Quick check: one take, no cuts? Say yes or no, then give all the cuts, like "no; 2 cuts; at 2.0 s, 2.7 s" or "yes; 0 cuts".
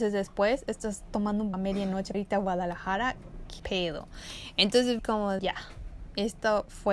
no; 5 cuts; at 1.5 s, 2.1 s, 3.6 s, 5.0 s, 5.4 s